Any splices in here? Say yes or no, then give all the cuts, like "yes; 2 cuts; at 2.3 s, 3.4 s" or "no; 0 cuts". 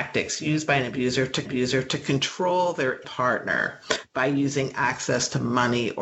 yes; 2 cuts; at 1.5 s, 3.0 s